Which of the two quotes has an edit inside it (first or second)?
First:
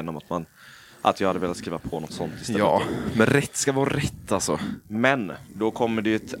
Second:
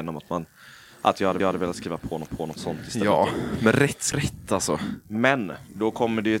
second